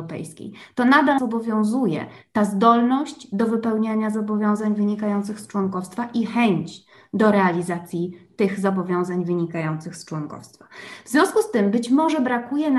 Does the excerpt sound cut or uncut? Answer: cut